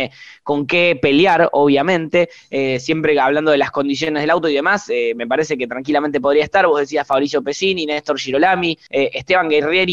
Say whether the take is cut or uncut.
uncut